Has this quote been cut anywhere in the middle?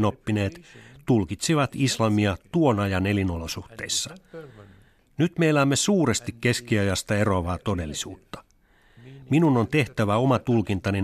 no; 0 cuts

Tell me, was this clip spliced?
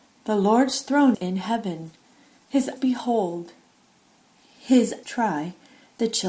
yes; 3 cuts; at 1.1 s, 2.8 s, 5.0 s

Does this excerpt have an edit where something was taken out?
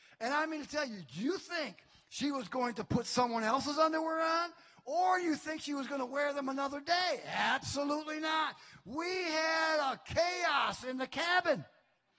no; 0 cuts

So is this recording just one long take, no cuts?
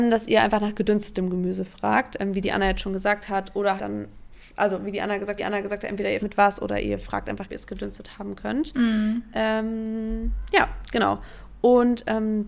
no; 4 cuts; at 3.8 s, 5.4 s, 6.2 s, 7.5 s

